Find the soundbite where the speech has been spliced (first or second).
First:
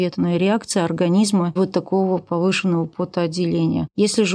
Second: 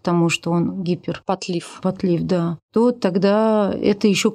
first